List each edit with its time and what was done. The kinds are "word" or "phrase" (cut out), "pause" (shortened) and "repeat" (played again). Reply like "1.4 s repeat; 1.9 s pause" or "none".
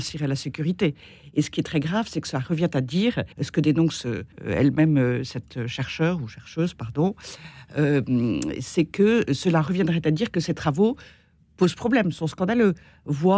3.3 s pause; 4.3 s pause

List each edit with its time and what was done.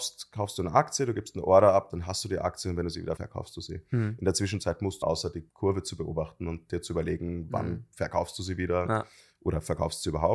3.2 s word; 5.0 s phrase; 5.5 s pause

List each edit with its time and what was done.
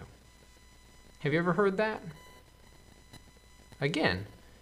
none

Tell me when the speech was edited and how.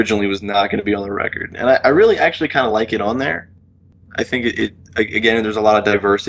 none

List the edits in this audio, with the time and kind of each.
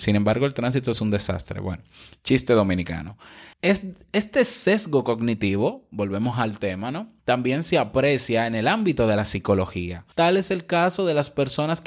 3.5 s pause; 7.2 s pause; 10.1 s pause

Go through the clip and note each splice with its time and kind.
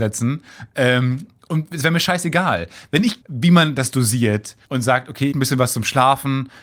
3.2 s word; 4.6 s pause; 5.3 s phrase

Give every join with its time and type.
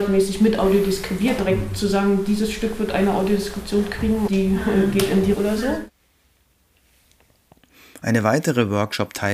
1.4 s word; 4.3 s word; 5.3 s word

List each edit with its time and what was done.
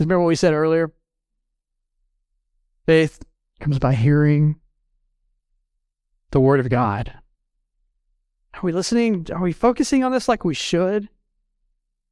none

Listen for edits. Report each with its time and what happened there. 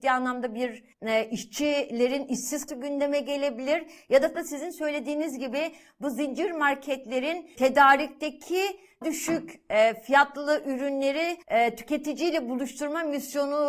0.9 s pause; 2.7 s word; 4.3 s word; 7.6 s word; 9.0 s word; 11.4 s pause

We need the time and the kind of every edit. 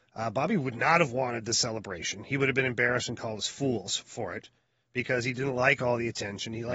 none

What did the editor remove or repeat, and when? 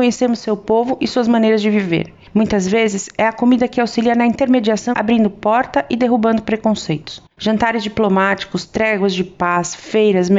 4.9 s phrase; 7.3 s pause

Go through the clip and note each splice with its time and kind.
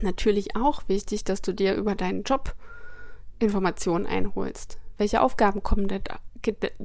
none

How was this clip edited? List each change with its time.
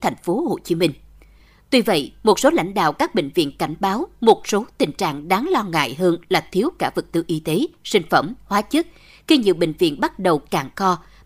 none

